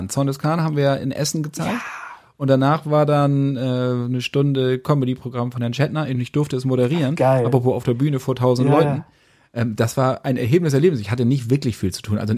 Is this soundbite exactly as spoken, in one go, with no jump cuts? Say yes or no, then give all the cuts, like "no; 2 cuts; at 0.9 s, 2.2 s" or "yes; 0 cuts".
yes; 0 cuts